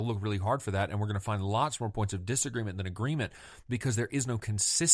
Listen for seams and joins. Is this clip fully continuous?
yes; 0 cuts

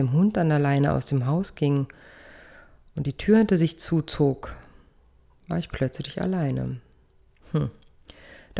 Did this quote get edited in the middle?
no; 0 cuts

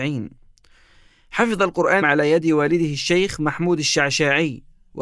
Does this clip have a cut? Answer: yes; 1 cut; at 2.0 s

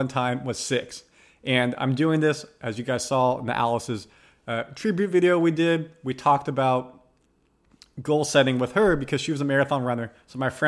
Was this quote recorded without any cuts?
yes; 0 cuts

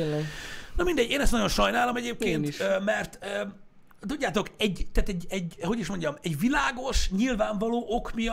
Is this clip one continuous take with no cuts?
yes; 0 cuts

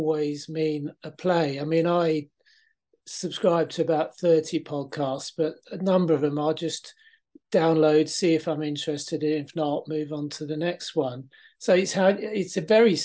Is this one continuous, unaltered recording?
yes; 0 cuts

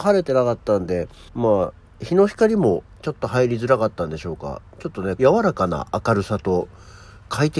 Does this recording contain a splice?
yes; 2 cuts; at 1.3 s, 5.2 s

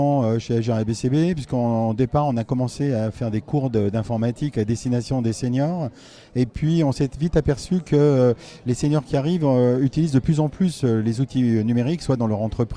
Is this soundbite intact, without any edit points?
yes; 0 cuts

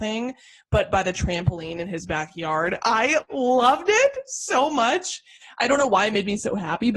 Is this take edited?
no; 0 cuts

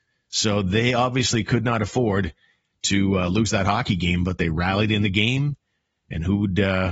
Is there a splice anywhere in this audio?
no; 0 cuts

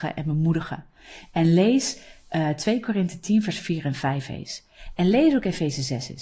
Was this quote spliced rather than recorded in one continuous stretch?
no; 0 cuts

